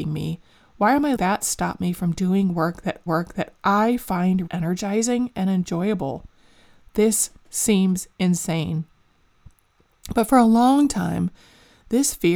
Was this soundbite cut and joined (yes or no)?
yes